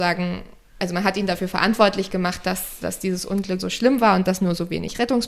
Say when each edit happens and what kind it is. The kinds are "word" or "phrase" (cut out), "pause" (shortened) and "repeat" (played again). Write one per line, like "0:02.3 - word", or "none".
0:03.6 - word